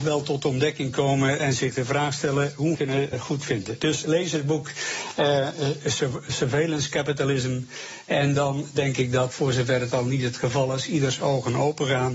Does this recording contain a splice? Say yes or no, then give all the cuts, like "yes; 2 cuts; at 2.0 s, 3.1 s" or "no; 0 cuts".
yes; 2 cuts; at 2.7 s, 3.1 s